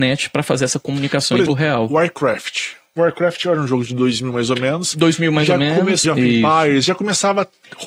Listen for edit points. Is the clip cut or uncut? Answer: cut